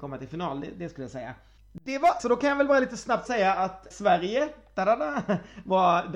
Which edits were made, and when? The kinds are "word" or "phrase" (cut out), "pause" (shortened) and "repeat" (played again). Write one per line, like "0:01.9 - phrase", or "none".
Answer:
0:01.6 - pause
0:02.2 - word
0:03.3 - phrase
0:03.9 - word